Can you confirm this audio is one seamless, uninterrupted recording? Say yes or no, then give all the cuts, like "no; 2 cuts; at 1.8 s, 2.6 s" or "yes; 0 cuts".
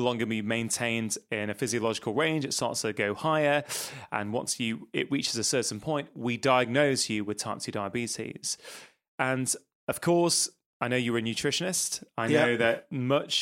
yes; 0 cuts